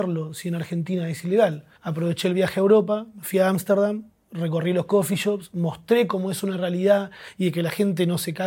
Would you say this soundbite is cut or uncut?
cut